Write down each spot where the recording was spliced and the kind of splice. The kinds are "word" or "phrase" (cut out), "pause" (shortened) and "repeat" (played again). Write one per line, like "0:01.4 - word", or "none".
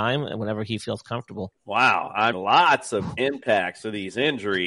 0:01.6 - pause
0:02.3 - word